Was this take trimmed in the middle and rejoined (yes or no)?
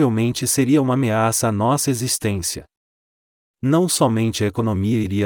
no